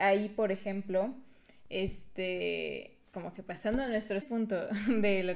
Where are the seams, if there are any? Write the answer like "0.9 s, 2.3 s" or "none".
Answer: 3.1 s, 4.2 s